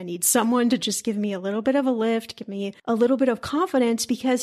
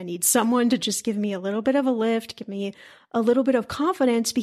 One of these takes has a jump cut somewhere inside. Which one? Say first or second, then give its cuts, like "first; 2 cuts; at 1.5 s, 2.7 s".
first; 1 cut; at 2.8 s